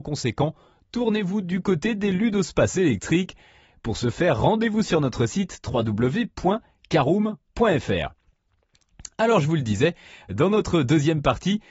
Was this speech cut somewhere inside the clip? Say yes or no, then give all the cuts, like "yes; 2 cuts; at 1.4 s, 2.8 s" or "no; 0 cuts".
no; 0 cuts